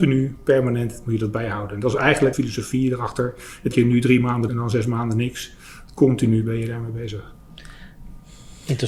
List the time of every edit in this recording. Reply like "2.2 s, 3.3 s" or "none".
2.3 s, 3.7 s, 4.5 s

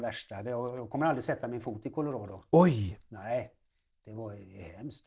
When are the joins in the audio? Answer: none

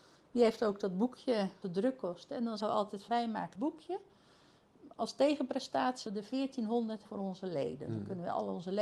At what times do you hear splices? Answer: 1.6 s, 2.6 s, 3.1 s, 3.5 s, 6.1 s, 7.0 s

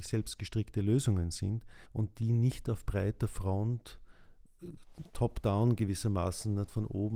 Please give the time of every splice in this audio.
1.9 s

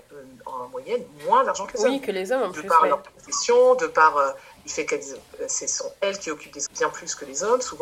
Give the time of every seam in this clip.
6.7 s

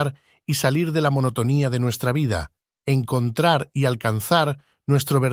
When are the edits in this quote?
none

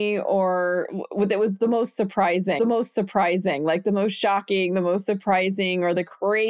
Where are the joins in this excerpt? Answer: 2.6 s

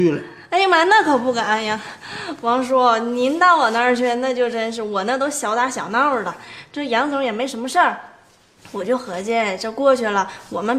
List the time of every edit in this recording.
none

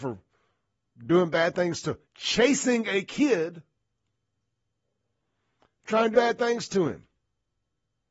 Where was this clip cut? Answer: 2.0 s, 6.1 s

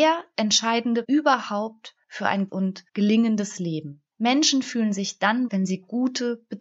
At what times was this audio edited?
1.0 s, 2.0 s, 2.5 s, 2.9 s, 4.1 s, 5.5 s

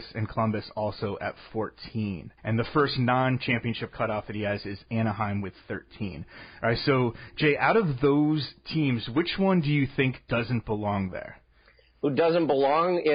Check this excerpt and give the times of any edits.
2.4 s

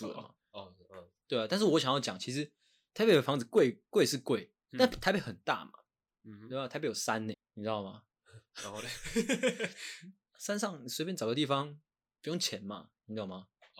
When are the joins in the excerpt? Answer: 7.3 s

